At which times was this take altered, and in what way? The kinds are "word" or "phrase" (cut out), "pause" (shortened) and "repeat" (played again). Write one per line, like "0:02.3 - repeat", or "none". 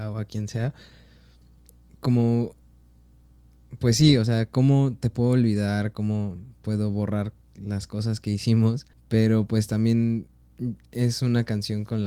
0:08.9 - pause

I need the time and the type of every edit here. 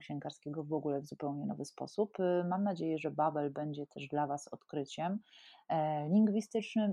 none

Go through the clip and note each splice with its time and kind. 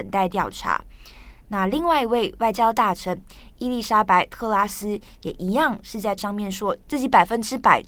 0:06.2 - word

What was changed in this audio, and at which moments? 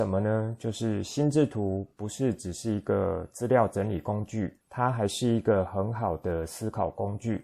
0:04.6 - pause

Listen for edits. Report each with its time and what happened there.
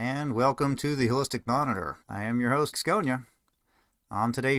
0:02.0 - pause
0:02.7 - word

